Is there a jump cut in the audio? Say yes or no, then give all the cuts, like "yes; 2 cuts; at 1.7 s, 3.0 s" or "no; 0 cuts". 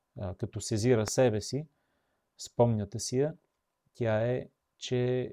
no; 0 cuts